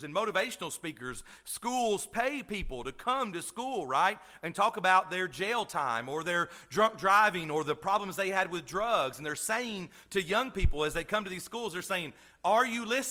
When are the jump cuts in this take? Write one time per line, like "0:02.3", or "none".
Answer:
none